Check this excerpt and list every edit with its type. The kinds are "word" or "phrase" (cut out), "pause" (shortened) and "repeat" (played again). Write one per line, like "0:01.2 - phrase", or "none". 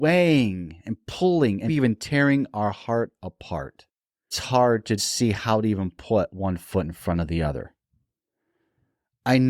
0:01.7 - word
0:04.3 - word
0:05.0 - word

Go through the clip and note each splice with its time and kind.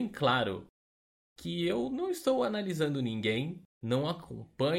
none

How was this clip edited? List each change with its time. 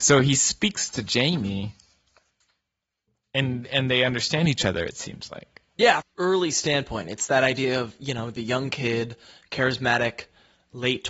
0:06.0 - phrase

